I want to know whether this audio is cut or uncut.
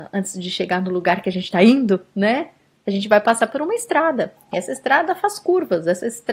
uncut